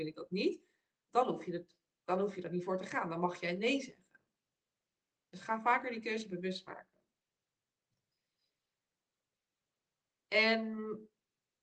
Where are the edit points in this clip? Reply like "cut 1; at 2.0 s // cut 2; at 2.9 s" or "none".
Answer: none